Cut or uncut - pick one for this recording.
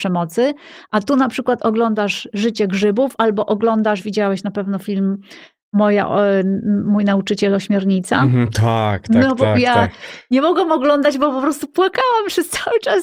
uncut